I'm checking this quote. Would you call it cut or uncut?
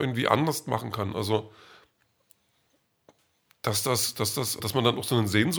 cut